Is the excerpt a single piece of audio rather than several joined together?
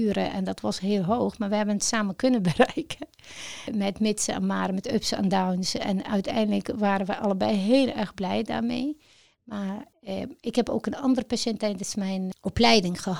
yes; 0 cuts

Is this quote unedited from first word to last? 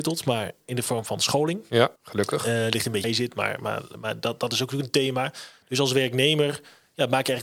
no; 2 cuts; at 2.0 s, 3.0 s

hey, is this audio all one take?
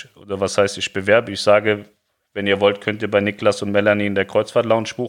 yes; 0 cuts

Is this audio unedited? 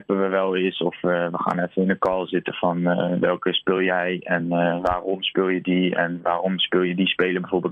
yes; 0 cuts

